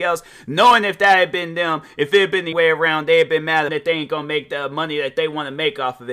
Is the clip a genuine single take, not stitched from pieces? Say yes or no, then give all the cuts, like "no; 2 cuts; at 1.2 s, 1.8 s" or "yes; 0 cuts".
no; 2 cuts; at 2.5 s, 3.7 s